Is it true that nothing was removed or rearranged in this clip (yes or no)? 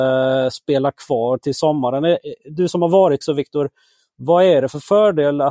no